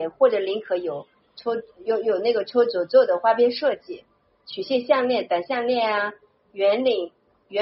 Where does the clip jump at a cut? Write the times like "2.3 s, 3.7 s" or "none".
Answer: none

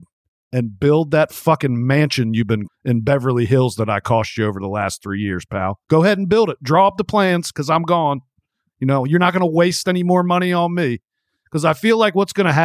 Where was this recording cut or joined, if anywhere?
2.7 s, 5.8 s

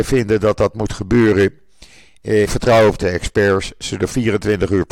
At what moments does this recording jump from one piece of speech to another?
2.4 s, 3.0 s, 4.0 s

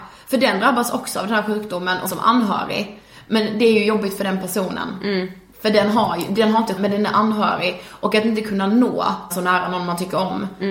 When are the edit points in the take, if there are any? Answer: 2.1 s, 6.8 s, 9.3 s

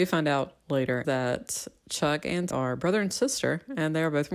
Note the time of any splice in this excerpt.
1.0 s, 2.5 s

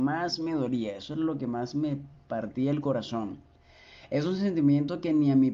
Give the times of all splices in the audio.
none

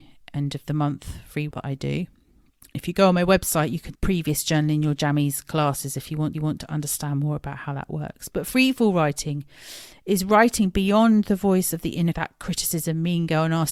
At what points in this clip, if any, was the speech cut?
1.5 s, 3.9 s, 6.3 s, 12.1 s

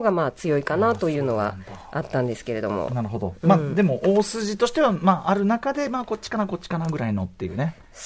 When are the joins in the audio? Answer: none

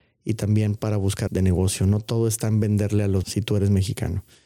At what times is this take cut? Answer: 1.3 s, 3.2 s

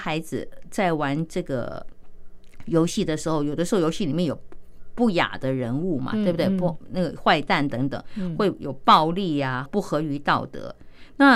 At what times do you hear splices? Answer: 9.6 s

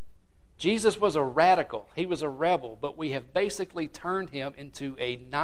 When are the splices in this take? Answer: none

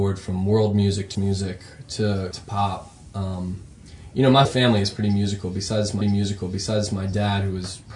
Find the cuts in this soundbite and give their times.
1.1 s, 2.3 s, 4.4 s, 6.0 s

